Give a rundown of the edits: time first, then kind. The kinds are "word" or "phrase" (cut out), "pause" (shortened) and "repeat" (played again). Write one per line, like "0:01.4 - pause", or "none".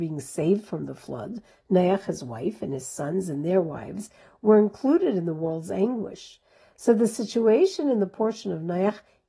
none